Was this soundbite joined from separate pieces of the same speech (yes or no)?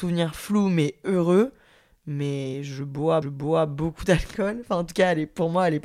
yes